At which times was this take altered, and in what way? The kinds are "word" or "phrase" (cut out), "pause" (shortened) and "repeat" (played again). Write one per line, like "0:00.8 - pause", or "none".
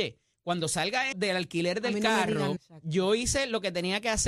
0:01.1 - word
0:02.6 - word